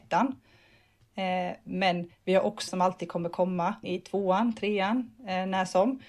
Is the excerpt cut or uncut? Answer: cut